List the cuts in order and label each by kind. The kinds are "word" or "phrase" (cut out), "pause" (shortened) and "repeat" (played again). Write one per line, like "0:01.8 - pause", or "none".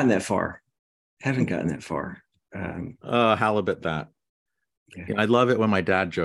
none